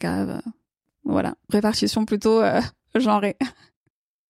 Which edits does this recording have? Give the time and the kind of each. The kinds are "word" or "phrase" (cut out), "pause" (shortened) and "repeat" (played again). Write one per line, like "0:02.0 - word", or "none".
0:01.5 - word